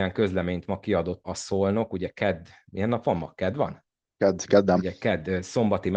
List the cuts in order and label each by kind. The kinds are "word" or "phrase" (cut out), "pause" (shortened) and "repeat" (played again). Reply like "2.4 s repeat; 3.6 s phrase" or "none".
1.2 s word